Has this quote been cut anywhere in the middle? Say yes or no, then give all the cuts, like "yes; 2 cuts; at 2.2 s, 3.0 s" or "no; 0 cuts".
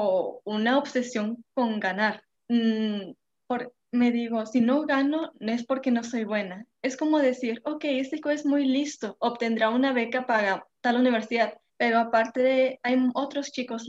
yes; 3 cuts; at 2.3 s, 8.2 s, 11.7 s